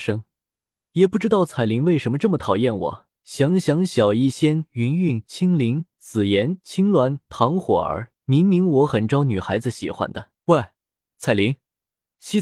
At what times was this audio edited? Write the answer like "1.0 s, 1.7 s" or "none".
3.2 s, 8.2 s, 10.4 s